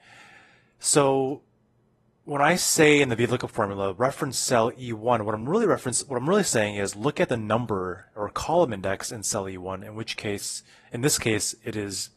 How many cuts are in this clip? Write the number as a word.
zero